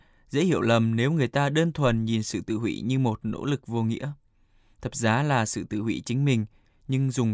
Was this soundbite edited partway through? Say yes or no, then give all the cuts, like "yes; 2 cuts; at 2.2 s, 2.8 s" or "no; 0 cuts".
no; 0 cuts